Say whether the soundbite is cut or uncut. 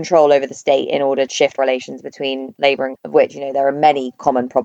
cut